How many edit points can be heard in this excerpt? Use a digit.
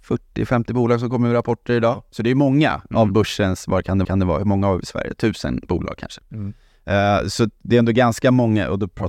1